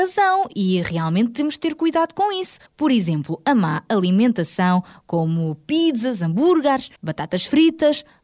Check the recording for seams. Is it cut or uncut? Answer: cut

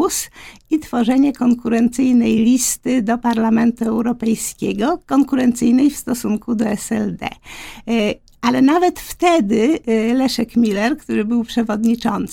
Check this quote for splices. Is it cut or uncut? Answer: uncut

